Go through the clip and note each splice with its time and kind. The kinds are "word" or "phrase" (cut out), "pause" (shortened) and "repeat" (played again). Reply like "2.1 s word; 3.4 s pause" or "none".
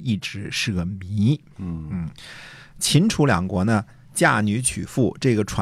none